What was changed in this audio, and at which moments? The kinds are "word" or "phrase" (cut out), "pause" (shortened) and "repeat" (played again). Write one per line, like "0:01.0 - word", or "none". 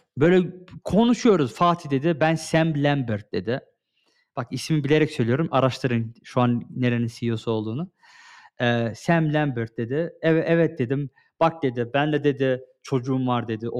none